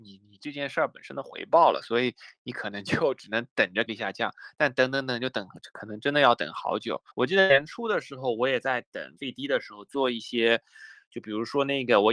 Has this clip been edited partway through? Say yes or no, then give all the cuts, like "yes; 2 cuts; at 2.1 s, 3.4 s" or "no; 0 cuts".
yes; 3 cuts; at 3.9 s, 7.1 s, 9.2 s